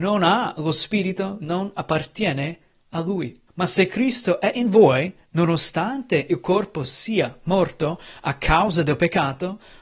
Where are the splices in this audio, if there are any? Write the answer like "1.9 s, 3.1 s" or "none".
1.4 s, 3.5 s